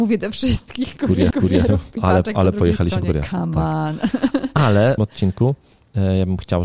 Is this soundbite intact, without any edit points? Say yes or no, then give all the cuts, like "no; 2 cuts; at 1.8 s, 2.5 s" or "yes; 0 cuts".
no; 3 cuts; at 1.3 s, 2.0 s, 5.0 s